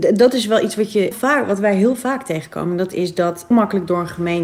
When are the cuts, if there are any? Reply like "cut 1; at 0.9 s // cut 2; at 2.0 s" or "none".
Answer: cut 1; at 1.1 s // cut 2; at 3.5 s